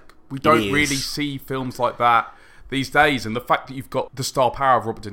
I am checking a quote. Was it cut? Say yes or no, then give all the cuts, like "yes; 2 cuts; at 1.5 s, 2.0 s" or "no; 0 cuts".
no; 0 cuts